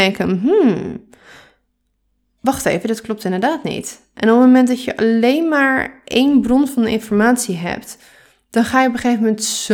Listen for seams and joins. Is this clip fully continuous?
yes; 0 cuts

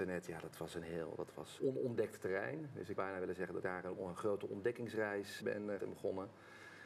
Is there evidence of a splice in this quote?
yes; 6 cuts; at 1.6 s, 3.0 s, 3.6 s, 4.0 s, 5.4 s, 5.8 s

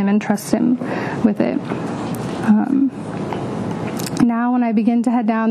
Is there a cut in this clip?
no; 0 cuts

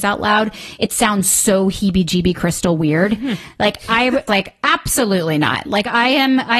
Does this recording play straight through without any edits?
no; 1 cut; at 4.3 s

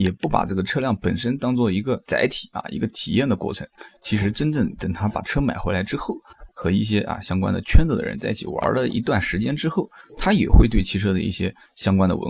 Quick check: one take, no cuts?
yes; 0 cuts

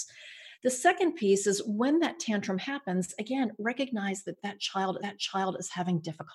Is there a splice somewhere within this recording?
yes; 1 cut; at 5.0 s

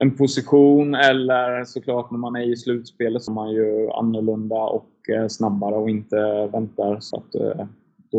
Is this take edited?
yes; 2 cuts; at 3.3 s, 7.1 s

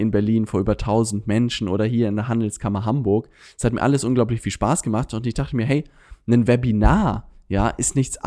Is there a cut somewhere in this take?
no; 0 cuts

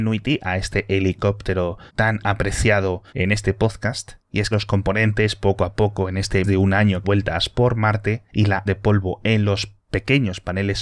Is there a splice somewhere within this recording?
yes; 8 cuts; at 1.9 s, 3.1 s, 4.2 s, 4.5 s, 6.4 s, 7.0 s, 8.3 s, 8.7 s

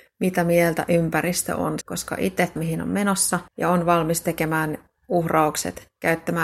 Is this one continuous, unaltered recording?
no; 3 cuts; at 1.8 s, 2.6 s, 3.5 s

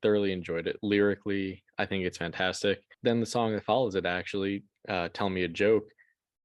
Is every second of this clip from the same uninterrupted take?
no; 1 cut; at 2.9 s

